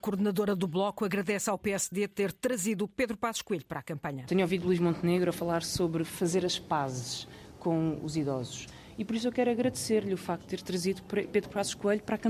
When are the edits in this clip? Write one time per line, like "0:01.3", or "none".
none

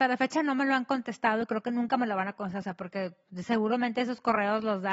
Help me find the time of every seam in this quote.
none

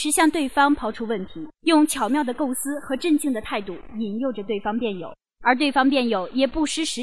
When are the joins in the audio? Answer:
0:01.5
0:05.2

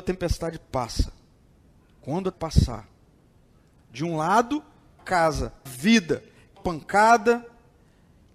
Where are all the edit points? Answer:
0:02.3
0:05.0
0:05.7
0:06.6

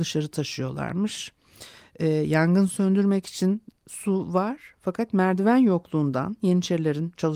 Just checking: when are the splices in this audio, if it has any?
none

